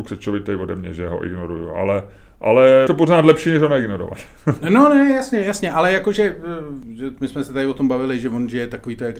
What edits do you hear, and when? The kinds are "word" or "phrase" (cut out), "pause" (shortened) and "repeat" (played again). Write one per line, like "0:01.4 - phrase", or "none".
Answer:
0:02.9 - word